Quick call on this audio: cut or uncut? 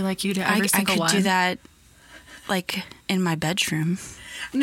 cut